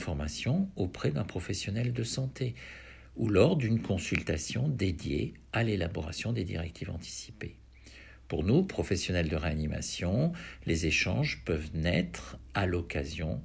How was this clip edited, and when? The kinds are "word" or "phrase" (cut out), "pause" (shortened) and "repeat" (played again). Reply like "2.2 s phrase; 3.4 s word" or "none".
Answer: none